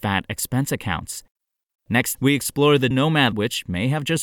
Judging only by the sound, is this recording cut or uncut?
cut